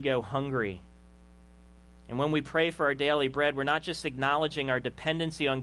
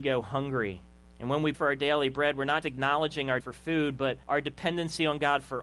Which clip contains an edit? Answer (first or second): second